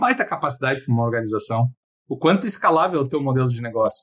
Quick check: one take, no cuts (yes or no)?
yes